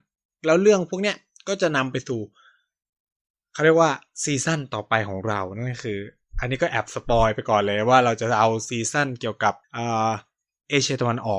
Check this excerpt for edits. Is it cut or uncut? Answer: cut